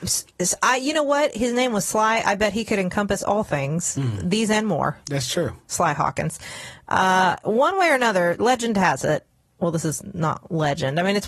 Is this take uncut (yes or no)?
yes